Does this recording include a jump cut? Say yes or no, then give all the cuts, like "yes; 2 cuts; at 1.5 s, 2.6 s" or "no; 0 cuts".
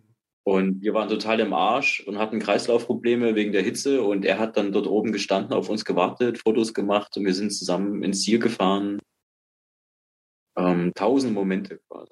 no; 0 cuts